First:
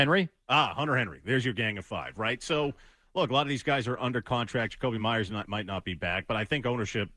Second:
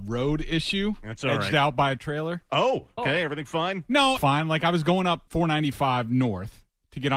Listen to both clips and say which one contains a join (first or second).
second